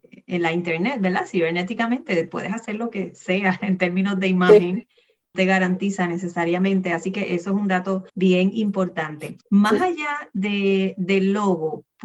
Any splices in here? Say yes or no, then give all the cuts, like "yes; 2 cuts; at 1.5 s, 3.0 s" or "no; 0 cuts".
yes; 3 cuts; at 5.3 s, 8.1 s, 9.4 s